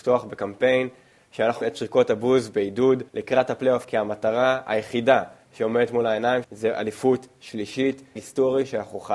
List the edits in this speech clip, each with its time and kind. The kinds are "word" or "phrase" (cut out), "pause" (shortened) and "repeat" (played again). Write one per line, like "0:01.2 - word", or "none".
0:01.6 - word
0:03.1 - pause
0:03.8 - word
0:06.4 - word
0:08.2 - word